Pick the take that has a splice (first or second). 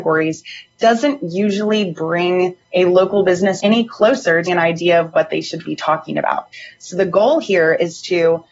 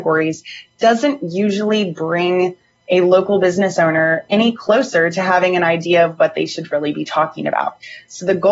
first